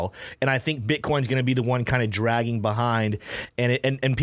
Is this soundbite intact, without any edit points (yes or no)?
yes